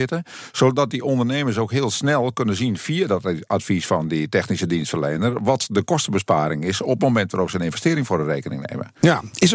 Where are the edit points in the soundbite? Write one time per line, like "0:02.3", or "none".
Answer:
none